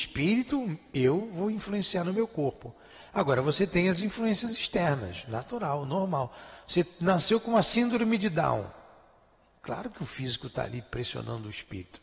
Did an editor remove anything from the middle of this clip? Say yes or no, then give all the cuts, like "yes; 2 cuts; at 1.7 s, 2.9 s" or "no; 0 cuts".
no; 0 cuts